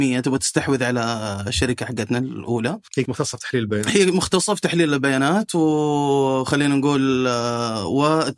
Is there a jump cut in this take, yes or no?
yes